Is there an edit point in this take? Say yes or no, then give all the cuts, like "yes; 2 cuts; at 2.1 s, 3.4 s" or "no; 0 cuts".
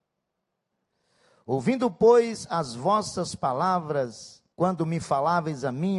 yes; 1 cut; at 4.5 s